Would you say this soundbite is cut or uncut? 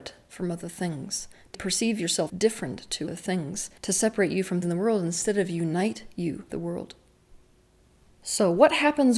cut